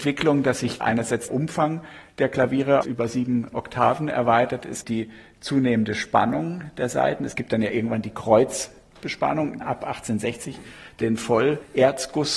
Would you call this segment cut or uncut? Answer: cut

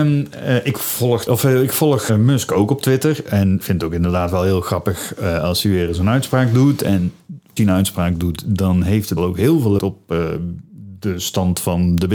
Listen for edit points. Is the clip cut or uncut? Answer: cut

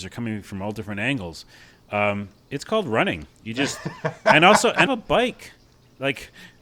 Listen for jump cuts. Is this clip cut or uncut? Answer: cut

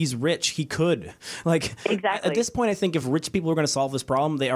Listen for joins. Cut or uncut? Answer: uncut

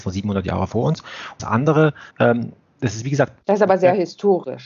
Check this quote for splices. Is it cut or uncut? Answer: cut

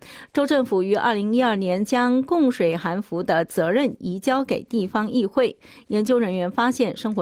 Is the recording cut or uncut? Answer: uncut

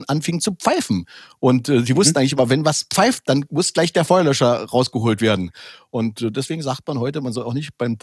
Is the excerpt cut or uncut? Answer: uncut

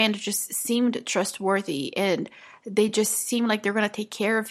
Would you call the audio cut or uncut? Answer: uncut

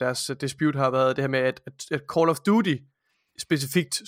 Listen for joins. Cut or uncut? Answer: uncut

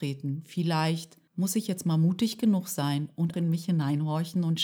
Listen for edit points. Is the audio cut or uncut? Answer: cut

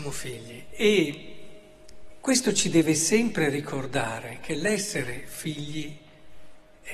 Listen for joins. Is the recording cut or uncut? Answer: uncut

